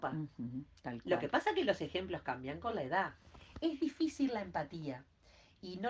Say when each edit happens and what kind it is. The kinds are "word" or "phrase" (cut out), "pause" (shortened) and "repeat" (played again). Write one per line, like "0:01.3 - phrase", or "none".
none